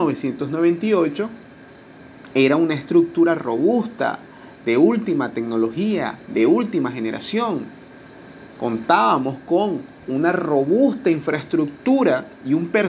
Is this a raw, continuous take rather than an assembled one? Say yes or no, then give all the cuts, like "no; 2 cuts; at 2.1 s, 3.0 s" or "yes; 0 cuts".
no; 1 cut; at 10.0 s